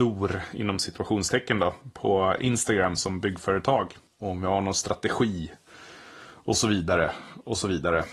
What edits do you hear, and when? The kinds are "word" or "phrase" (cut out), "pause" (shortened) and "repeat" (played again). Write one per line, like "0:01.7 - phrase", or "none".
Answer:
none